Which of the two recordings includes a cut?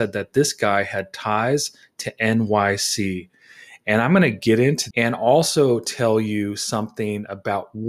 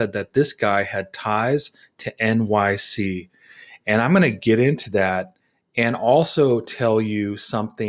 first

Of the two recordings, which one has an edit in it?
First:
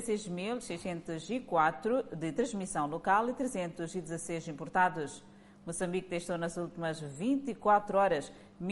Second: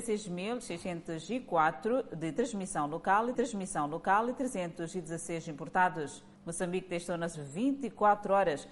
second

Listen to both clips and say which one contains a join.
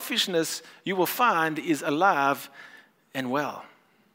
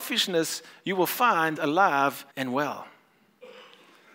second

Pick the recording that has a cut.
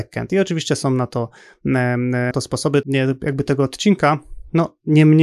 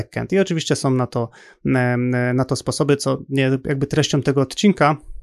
first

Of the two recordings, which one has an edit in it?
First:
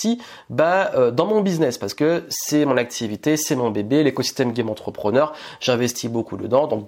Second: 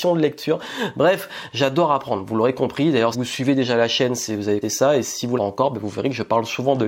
second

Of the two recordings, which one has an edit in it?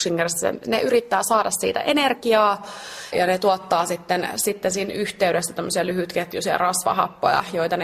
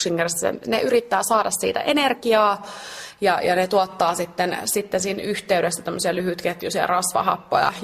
first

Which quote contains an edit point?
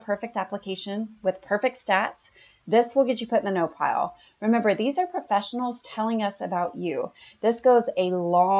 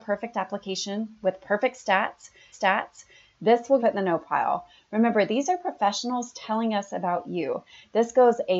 second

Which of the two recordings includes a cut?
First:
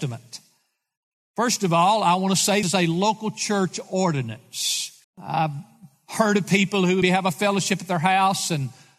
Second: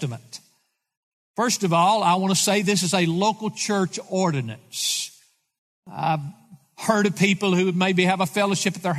first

